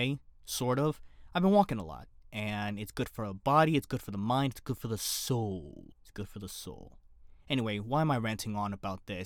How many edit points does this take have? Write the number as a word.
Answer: one